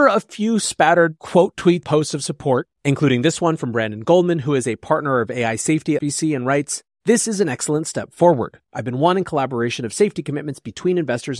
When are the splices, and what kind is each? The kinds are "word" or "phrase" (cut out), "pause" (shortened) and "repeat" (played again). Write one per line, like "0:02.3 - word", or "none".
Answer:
0:01.8 - word
0:06.0 - phrase